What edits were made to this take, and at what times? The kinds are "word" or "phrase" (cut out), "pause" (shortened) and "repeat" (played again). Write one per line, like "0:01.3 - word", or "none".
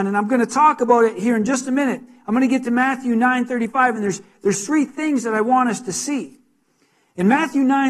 none